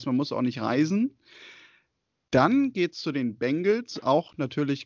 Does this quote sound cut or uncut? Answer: uncut